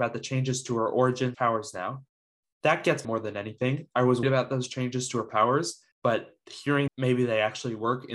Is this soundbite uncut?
no; 5 cuts; at 1.3 s, 3.0 s, 4.2 s, 5.9 s, 6.9 s

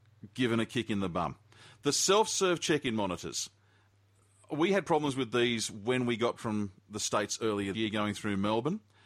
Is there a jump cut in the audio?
yes; 2 cuts; at 6.4 s, 7.7 s

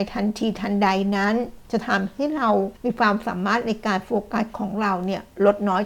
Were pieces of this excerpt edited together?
yes; 2 cuts; at 1.6 s, 2.8 s

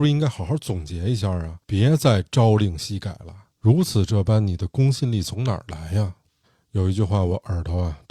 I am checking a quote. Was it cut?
yes; 3 cuts; at 1.6 s, 3.5 s, 6.3 s

